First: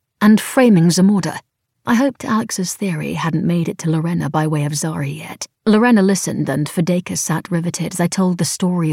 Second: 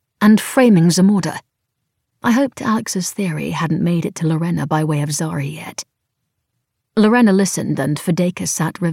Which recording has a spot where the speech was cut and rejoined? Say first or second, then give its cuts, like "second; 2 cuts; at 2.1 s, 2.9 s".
first; 2 cuts; at 1.7 s, 5.5 s